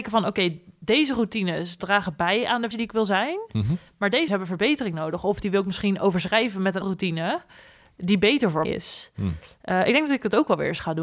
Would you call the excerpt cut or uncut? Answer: cut